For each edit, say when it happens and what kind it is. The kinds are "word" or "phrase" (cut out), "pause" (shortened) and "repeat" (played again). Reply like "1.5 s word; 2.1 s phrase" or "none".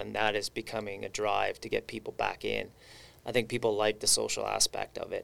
none